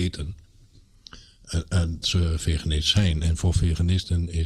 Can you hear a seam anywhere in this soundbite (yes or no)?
yes